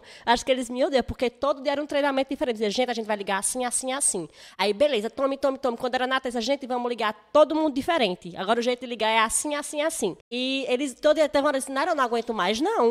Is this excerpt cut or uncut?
cut